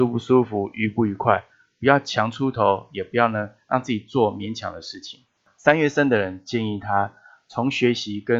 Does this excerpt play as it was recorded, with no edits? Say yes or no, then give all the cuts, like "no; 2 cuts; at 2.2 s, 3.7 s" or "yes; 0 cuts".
yes; 0 cuts